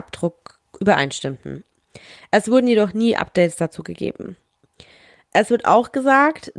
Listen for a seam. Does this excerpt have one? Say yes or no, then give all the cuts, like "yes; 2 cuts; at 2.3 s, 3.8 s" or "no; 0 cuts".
no; 0 cuts